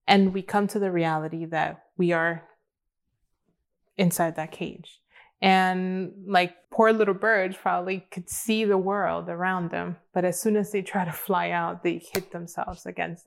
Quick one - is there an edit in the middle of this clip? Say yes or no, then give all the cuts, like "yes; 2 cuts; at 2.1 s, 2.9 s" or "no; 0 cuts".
yes; 1 cut; at 6.6 s